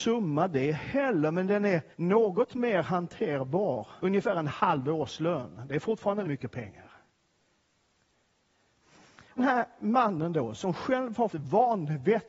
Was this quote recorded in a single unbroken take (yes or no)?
no